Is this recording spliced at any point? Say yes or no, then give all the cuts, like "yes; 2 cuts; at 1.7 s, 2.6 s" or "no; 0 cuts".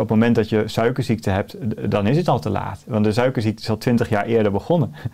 no; 0 cuts